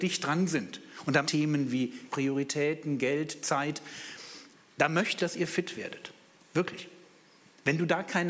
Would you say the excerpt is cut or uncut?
cut